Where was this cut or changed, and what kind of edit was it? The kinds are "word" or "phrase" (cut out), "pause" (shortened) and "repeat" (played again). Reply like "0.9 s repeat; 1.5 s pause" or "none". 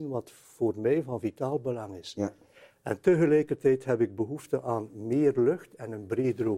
none